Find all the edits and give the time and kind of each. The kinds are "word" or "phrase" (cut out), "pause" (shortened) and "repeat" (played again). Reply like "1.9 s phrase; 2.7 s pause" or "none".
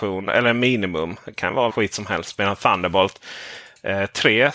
1.7 s word